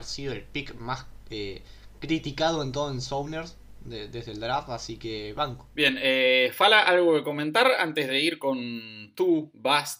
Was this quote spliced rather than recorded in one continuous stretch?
no; 0 cuts

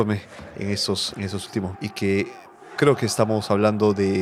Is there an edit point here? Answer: yes; 3 cuts; at 1.1 s, 1.7 s, 2.8 s

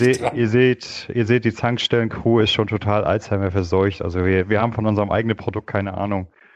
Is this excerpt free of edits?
yes; 0 cuts

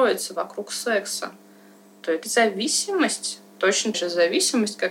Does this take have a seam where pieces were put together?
yes; 2 cuts; at 2.2 s, 3.9 s

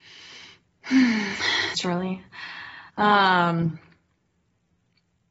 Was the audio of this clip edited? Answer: yes; 2 cuts; at 1.7 s, 2.9 s

